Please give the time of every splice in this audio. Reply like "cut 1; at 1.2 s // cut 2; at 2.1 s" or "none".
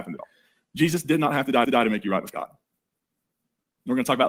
cut 1; at 1.6 s